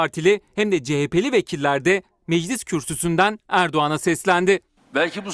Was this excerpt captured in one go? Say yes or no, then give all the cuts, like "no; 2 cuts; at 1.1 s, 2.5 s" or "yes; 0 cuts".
yes; 0 cuts